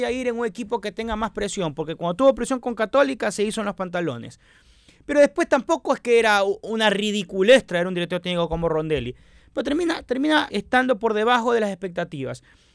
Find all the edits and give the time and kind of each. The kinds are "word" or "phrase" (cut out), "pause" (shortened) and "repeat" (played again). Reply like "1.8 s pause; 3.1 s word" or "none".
10.5 s word